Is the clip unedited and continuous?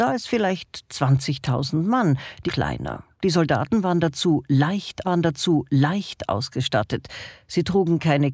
no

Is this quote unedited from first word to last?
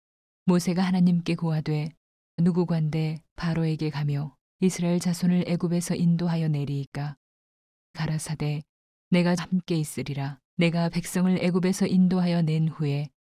no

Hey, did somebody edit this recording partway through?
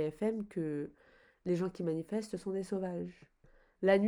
no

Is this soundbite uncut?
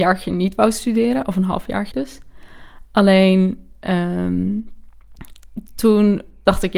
no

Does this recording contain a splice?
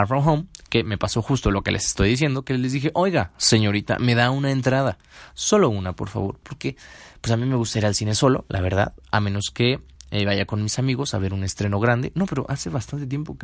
no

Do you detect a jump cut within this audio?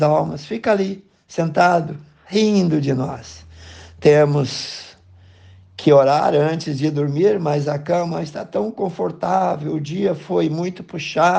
no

